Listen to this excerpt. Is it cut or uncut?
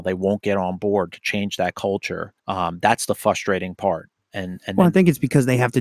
cut